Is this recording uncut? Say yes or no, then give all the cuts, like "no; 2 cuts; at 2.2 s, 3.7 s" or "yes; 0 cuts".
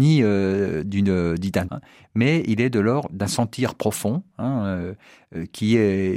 no; 1 cut; at 1.7 s